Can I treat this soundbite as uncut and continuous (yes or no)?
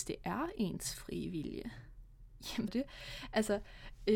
no